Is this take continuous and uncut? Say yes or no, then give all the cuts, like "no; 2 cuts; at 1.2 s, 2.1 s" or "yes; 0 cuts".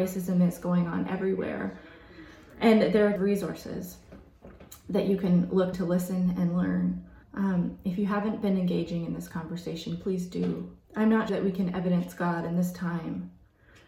no; 5 cuts; at 3.2 s, 5.7 s, 7.2 s, 10.8 s, 11.3 s